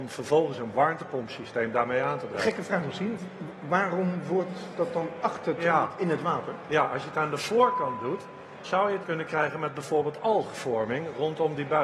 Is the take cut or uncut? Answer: cut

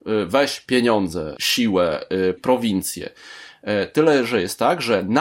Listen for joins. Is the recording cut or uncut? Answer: cut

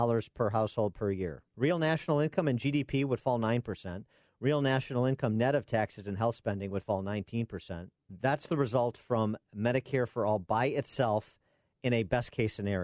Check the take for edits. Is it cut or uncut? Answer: cut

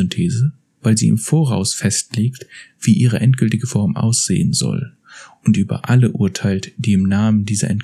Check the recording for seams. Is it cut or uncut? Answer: uncut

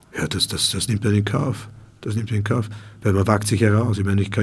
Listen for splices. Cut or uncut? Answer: uncut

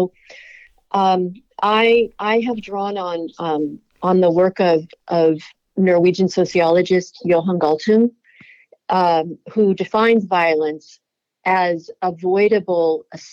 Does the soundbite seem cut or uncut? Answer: uncut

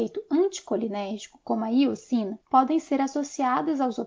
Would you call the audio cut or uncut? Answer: cut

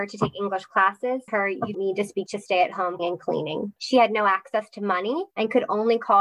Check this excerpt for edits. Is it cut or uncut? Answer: cut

